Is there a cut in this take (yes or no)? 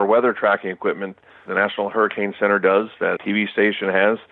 yes